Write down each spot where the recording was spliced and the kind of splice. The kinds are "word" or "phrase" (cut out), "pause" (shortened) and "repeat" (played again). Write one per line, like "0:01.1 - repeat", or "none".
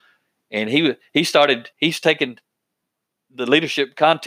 0:01.7 - pause